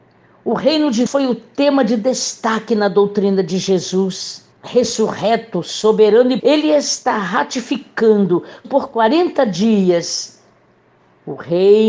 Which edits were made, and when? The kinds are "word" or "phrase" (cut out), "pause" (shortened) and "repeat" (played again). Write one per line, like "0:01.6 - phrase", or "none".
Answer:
0:01.1 - word
0:04.5 - pause
0:06.4 - word
0:08.6 - word